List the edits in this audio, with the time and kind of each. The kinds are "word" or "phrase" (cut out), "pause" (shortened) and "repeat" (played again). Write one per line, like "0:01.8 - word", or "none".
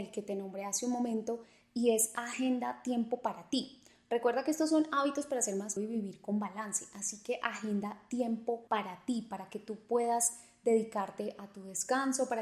0:05.8 - word
0:08.7 - pause